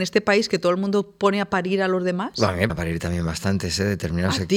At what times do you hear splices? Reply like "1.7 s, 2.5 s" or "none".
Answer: 2.7 s

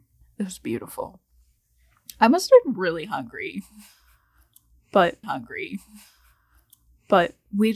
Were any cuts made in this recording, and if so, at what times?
5.2 s

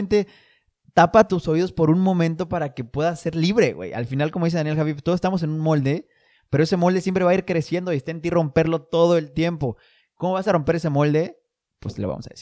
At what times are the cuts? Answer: none

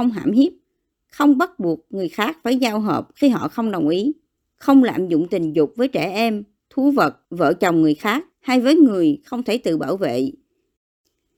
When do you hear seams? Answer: 4.4 s, 7.2 s, 8.3 s

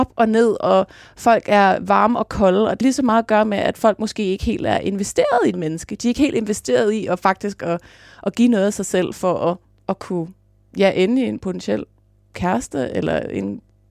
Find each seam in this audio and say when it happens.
2.8 s, 5.5 s, 9.6 s

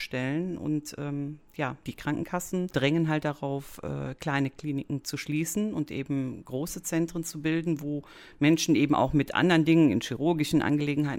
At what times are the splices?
none

